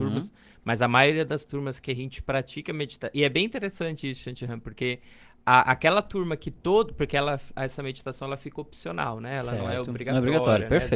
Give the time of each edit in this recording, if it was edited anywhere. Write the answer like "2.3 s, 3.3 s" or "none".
none